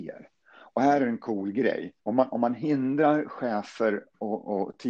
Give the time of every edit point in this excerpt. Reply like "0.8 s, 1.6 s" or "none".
2.0 s